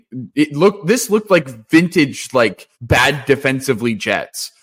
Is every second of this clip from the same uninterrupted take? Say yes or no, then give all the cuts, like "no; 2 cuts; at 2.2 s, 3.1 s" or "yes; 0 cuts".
no; 1 cut; at 2.7 s